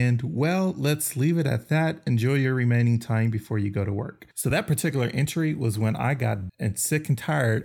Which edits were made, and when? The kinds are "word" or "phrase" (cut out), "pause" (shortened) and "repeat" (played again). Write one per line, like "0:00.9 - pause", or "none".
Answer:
0:04.3 - pause
0:06.5 - word